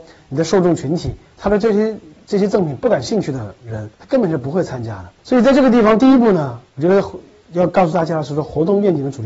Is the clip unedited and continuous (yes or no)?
no